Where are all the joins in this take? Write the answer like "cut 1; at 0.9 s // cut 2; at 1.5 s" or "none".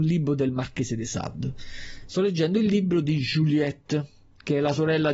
none